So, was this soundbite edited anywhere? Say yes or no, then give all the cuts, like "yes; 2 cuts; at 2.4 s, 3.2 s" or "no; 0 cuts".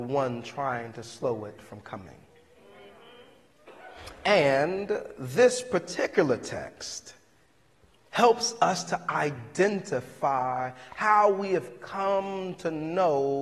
no; 0 cuts